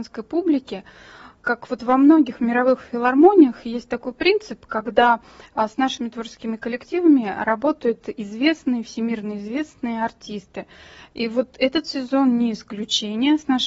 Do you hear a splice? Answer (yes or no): no